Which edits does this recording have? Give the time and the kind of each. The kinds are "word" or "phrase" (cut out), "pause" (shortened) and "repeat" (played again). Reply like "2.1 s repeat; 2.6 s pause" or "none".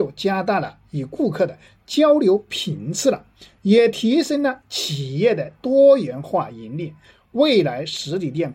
none